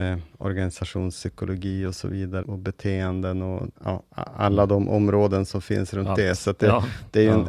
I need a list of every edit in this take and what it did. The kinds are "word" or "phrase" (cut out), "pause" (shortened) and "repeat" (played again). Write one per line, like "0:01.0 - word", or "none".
0:02.4 - word
0:03.8 - pause